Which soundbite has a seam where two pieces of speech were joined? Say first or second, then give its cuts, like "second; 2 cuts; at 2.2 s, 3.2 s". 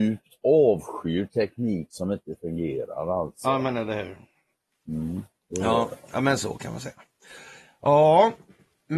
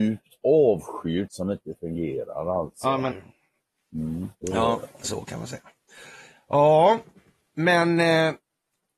second; 4 cuts; at 1.3 s, 3.1 s, 4.3 s, 5.0 s